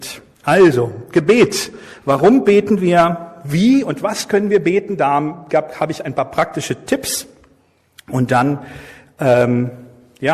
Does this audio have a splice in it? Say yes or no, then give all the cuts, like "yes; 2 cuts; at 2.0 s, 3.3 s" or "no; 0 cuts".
no; 0 cuts